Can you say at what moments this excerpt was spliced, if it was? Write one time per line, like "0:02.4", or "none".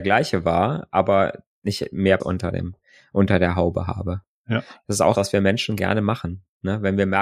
0:02.2
0:05.1